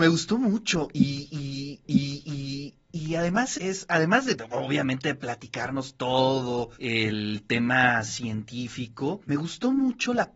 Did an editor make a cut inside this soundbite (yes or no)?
yes